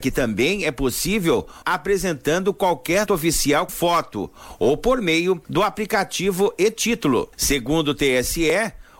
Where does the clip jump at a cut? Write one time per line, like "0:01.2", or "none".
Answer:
0:01.6
0:03.1
0:03.7
0:05.4
0:07.3